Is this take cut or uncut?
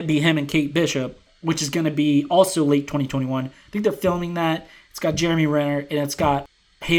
uncut